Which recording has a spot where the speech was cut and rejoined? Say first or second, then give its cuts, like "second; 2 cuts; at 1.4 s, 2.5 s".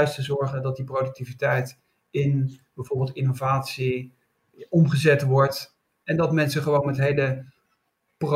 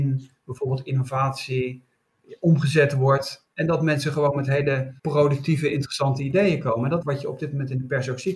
second; 3 cuts; at 3.5 s, 5.0 s, 7.0 s